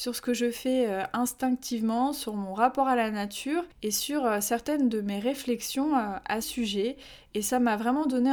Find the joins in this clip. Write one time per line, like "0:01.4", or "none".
0:06.4